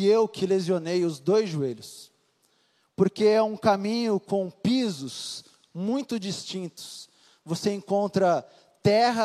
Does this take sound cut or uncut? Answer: uncut